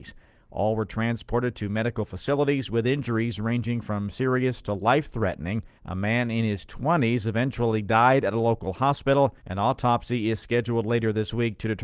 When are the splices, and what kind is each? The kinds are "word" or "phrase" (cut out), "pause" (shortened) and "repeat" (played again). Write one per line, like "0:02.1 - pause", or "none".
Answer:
0:05.8 - pause
0:09.4 - pause